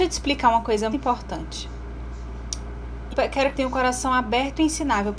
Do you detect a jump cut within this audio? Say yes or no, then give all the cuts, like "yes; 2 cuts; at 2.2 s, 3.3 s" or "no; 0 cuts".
yes; 3 cuts; at 0.9 s, 3.1 s, 3.5 s